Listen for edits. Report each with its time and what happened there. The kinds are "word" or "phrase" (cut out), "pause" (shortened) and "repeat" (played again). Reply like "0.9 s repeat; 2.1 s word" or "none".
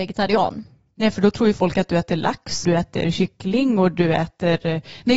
2.6 s word